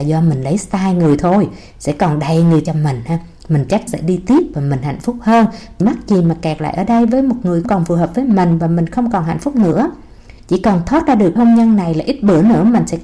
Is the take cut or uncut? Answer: cut